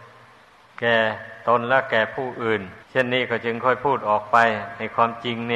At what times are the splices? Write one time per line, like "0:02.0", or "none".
0:02.8